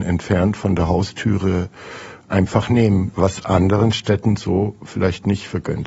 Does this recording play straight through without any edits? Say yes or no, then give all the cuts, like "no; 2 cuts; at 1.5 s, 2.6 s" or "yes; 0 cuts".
yes; 0 cuts